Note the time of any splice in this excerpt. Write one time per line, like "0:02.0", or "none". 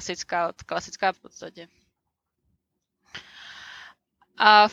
0:01.1